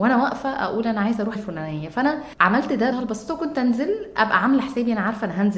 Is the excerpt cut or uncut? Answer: cut